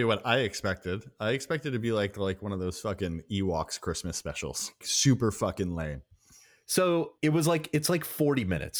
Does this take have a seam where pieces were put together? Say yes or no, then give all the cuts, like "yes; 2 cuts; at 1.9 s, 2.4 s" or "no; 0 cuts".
yes; 2 cuts; at 4.8 s, 7.2 s